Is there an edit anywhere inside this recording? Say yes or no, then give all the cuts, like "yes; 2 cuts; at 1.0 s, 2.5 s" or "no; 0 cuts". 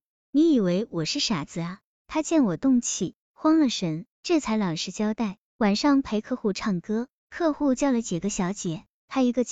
yes; 1 cut; at 4.1 s